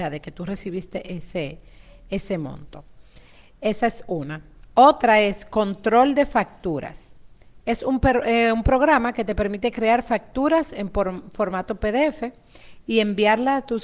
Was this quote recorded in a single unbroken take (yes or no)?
yes